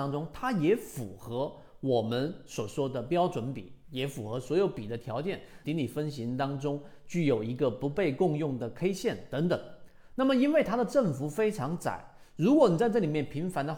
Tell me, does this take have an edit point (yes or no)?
yes